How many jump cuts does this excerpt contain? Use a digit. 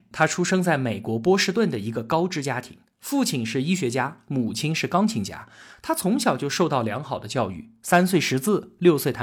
0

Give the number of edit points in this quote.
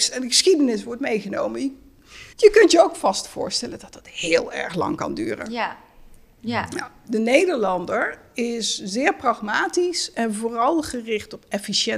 1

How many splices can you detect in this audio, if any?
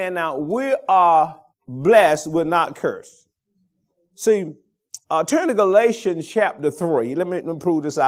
2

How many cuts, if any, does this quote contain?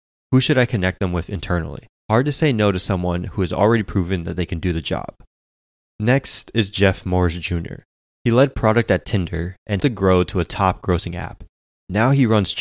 2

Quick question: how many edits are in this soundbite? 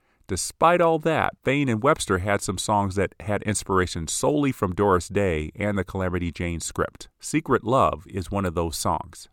2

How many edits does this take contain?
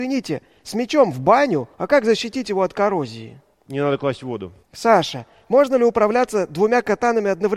3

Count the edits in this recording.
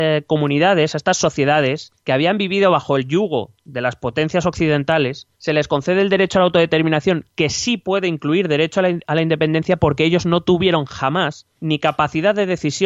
3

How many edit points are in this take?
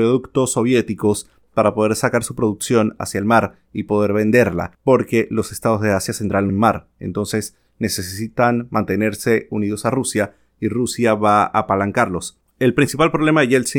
3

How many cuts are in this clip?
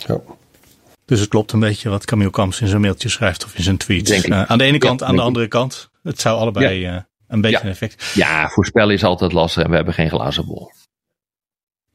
0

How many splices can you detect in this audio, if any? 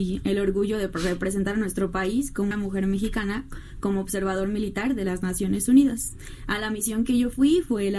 1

